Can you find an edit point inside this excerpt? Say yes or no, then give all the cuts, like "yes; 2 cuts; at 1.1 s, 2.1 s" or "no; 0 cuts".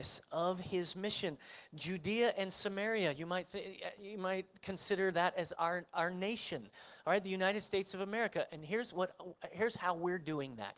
no; 0 cuts